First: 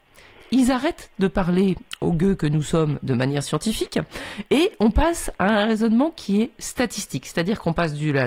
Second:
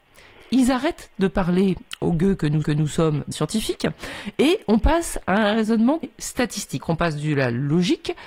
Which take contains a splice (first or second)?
second